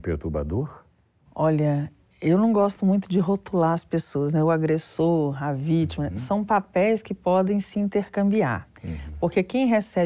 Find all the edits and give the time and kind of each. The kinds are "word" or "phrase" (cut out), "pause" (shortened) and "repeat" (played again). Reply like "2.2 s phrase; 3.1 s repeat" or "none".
none